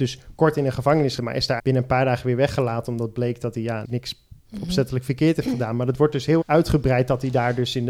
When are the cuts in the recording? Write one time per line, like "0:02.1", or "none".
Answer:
0:01.2
0:01.6
0:03.8
0:06.4